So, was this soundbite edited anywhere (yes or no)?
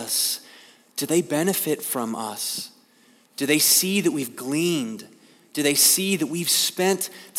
no